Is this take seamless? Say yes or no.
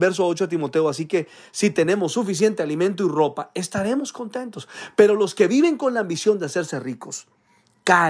yes